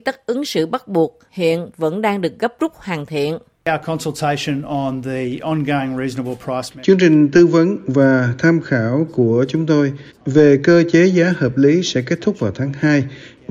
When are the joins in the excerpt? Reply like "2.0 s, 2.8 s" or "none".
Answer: none

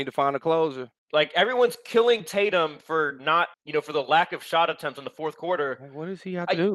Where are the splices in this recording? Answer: 1.0 s, 3.5 s

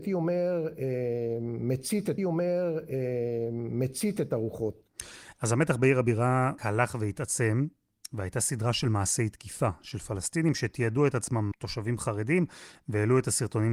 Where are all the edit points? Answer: 2.2 s, 6.6 s, 11.5 s

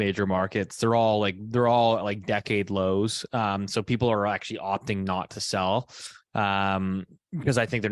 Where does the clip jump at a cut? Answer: none

